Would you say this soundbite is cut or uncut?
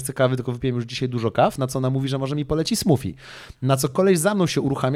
uncut